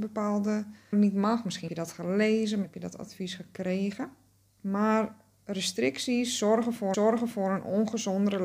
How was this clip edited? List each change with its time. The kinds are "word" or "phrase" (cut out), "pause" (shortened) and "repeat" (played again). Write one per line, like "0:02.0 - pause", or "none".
0:00.9 - word
0:01.7 - word
0:02.6 - word
0:04.4 - pause
0:06.9 - repeat